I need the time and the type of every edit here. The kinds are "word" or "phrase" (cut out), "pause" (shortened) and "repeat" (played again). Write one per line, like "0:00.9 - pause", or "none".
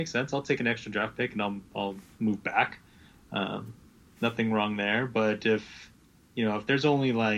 none